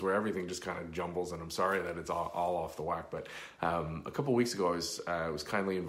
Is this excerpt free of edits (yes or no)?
yes